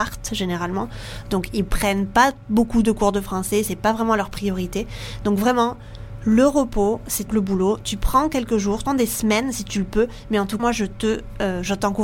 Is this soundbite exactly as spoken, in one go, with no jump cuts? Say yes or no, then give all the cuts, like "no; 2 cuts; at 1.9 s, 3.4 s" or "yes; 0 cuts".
no; 3 cuts; at 7.3 s, 8.9 s, 10.6 s